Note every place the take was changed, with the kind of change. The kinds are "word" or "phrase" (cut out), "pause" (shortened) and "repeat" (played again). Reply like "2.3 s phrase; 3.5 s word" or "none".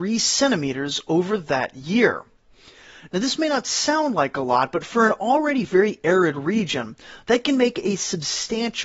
none